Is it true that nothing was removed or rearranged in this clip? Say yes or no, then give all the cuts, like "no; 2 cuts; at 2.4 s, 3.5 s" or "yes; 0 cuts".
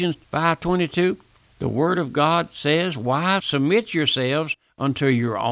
yes; 0 cuts